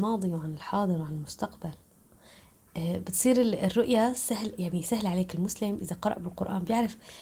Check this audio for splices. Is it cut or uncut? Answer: uncut